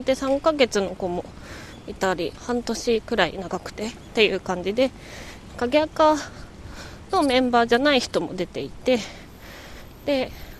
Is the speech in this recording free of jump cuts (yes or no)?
no